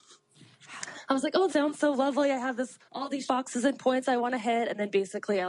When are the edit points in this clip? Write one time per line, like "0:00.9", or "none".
0:01.5
0:02.9
0:03.3